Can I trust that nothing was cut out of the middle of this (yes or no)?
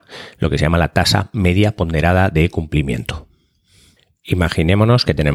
yes